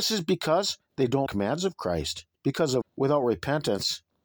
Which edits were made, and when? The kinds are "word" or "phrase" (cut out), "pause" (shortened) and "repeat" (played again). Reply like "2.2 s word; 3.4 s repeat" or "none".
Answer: 1.3 s phrase; 2.3 s pause; 2.8 s word